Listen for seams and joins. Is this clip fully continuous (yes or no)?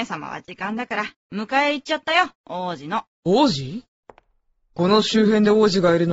yes